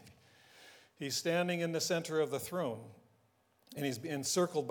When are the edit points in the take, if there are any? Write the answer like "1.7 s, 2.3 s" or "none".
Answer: none